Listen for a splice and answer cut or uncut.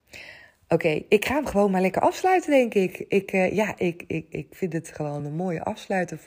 uncut